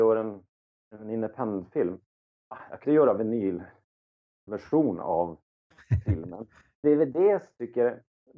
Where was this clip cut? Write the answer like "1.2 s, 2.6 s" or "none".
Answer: 2.8 s, 6.6 s